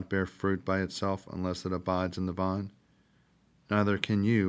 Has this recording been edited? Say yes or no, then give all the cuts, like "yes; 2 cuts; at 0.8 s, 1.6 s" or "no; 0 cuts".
no; 0 cuts